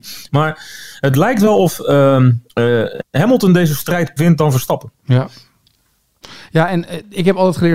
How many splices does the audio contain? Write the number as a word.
two